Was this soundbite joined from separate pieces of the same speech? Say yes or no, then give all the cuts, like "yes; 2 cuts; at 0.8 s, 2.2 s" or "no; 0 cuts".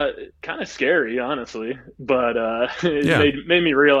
no; 0 cuts